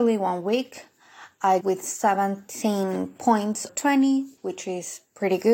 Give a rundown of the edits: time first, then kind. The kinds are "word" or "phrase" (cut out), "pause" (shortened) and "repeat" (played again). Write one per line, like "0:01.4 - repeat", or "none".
0:01.6 - word
0:03.7 - word
0:04.4 - pause